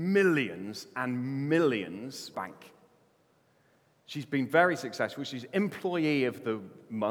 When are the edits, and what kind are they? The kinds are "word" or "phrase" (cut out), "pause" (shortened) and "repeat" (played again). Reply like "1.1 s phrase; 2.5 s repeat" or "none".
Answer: 2.3 s phrase